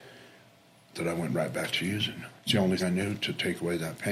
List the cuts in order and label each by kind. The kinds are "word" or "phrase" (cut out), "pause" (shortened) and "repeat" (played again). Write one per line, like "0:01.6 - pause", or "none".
0:02.4 - pause
0:02.8 - word